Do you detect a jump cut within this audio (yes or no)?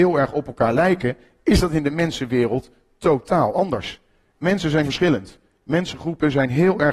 yes